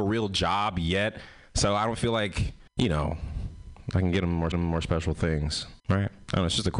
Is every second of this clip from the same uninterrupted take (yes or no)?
no